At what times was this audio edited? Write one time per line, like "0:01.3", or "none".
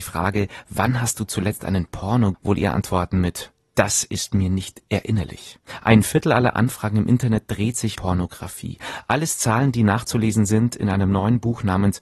0:02.3
0:07.9